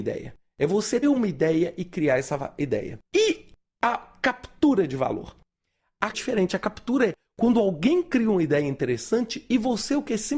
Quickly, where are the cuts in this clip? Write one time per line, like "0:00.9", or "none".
0:01.0
0:03.1
0:06.1